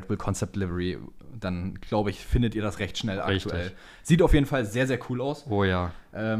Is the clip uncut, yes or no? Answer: yes